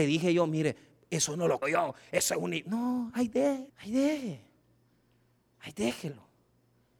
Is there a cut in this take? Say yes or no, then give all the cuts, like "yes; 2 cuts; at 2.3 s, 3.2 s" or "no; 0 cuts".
yes; 2 cuts; at 1.6 s, 3.7 s